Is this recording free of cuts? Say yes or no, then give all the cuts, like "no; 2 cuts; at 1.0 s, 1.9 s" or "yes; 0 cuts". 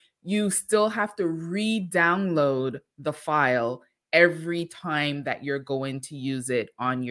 yes; 0 cuts